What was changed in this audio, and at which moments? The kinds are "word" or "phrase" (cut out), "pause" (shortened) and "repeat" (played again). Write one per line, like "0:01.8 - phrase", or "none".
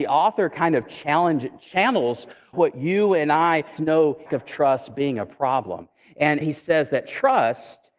0:02.5 - word
0:03.8 - word
0:04.3 - phrase
0:06.4 - word